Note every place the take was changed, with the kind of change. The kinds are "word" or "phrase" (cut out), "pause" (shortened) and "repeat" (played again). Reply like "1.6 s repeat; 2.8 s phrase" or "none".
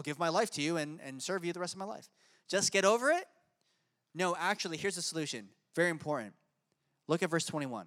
none